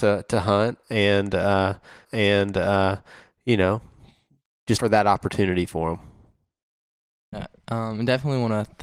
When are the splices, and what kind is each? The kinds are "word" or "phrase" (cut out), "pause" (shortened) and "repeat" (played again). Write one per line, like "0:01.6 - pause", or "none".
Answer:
0:02.0 - repeat
0:04.8 - word